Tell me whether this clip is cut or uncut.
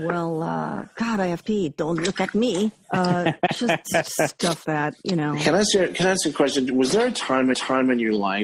cut